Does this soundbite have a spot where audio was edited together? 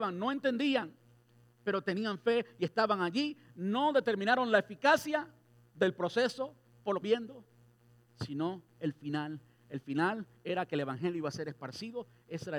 yes; 1 cut; at 7.0 s

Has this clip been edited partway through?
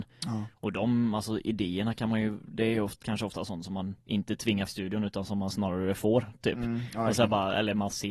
yes; 2 cuts; at 4.0 s, 4.7 s

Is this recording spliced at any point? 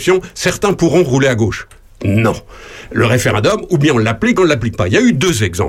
yes; 1 cut; at 4.4 s

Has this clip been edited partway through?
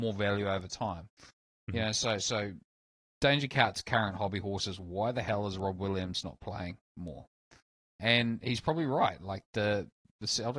no; 0 cuts

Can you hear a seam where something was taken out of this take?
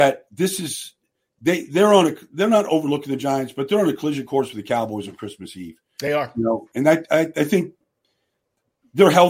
no; 0 cuts

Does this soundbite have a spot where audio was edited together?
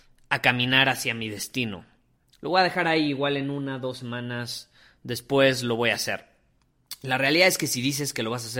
no; 0 cuts

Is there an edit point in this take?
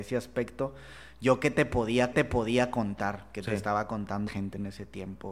yes; 2 cuts; at 2.1 s, 4.3 s

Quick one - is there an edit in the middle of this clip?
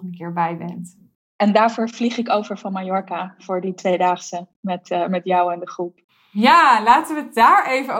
no; 0 cuts

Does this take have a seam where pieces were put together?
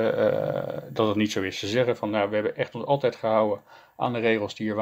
no; 0 cuts

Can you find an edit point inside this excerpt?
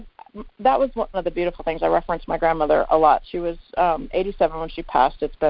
yes; 1 cut; at 1.1 s

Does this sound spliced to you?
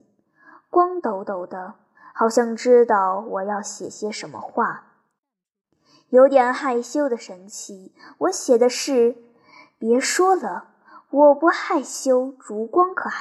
no; 0 cuts

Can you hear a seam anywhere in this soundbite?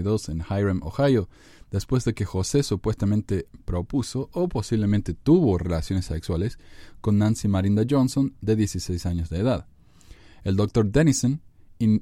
no; 0 cuts

